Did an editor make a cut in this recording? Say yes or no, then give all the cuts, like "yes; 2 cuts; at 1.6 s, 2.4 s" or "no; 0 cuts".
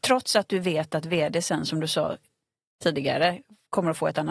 no; 0 cuts